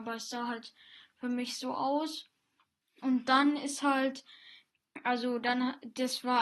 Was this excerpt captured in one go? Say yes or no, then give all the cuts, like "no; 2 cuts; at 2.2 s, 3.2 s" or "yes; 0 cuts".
yes; 0 cuts